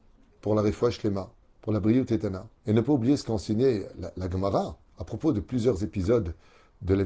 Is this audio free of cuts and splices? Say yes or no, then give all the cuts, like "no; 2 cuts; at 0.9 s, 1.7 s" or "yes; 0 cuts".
no; 3 cuts; at 1.4 s, 2.6 s, 4.9 s